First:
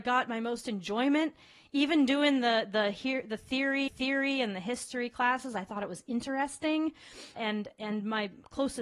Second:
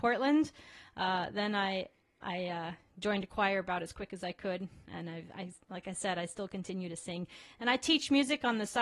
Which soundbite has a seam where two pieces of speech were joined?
first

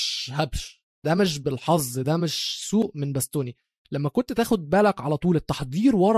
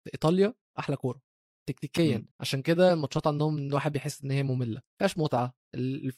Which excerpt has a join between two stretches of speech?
second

